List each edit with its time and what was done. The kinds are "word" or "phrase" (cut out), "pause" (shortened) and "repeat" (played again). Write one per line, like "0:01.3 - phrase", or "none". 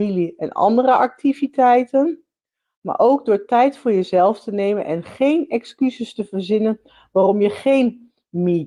none

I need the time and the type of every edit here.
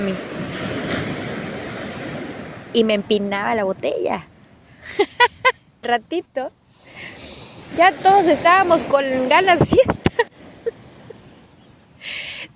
0:05.8 - word
0:09.6 - phrase

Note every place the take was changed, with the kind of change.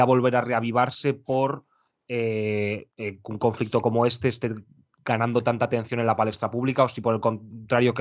none

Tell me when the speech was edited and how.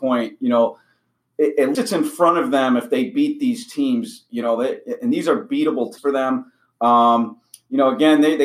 0:01.7 - word
0:06.0 - word

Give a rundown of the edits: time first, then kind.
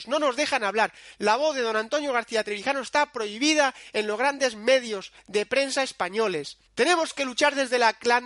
0:06.7 - pause

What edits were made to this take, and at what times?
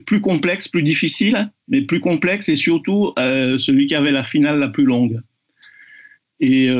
none

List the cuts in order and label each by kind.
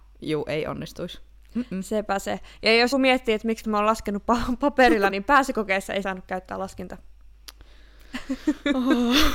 0:02.9 - word
0:03.6 - word
0:05.1 - word
0:06.0 - word

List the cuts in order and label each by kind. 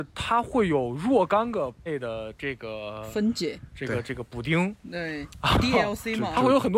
0:01.9 - word

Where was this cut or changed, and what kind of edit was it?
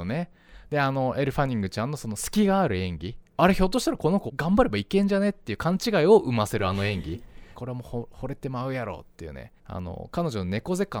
0:04.3 - word
0:09.6 - pause

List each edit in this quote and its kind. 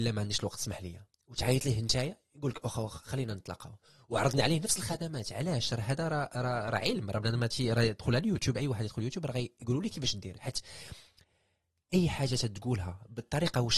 none

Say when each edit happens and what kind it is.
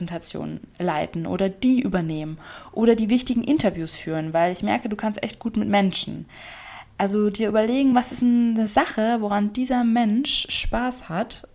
none

